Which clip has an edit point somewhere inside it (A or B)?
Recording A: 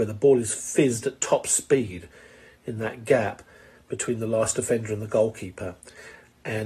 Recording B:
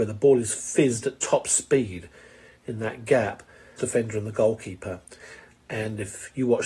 B